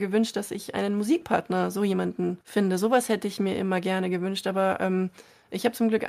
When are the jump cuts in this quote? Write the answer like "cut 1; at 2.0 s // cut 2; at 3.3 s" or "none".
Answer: cut 1; at 2.4 s

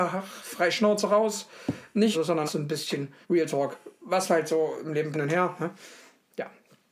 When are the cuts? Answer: cut 1; at 2.1 s // cut 2; at 2.5 s // cut 3; at 3.2 s // cut 4; at 5.1 s

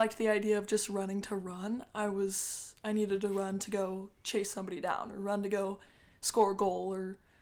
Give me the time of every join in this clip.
none

